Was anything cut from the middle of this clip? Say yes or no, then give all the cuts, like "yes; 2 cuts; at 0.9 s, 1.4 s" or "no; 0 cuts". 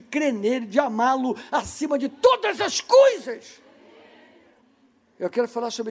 no; 0 cuts